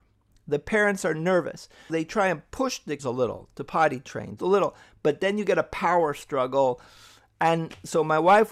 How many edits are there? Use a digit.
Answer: 3